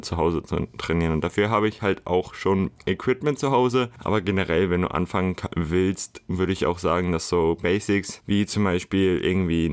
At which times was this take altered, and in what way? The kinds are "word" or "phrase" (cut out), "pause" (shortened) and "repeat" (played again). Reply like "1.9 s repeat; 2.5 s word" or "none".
none